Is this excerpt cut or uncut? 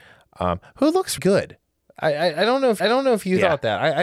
cut